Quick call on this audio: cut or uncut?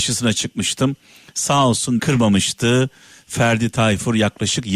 cut